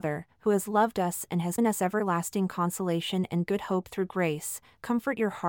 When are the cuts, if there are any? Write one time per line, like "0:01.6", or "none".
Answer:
0:01.6